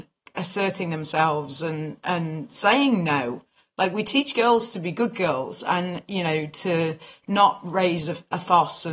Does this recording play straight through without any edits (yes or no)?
yes